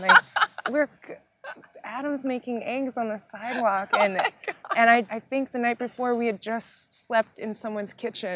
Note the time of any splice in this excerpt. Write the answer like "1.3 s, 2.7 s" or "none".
5.1 s